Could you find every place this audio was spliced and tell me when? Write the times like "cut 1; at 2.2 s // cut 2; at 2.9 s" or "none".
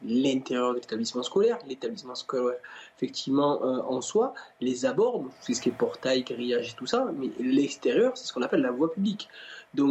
none